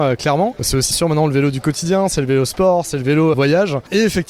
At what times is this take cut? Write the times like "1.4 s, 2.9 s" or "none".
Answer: 0.9 s, 3.3 s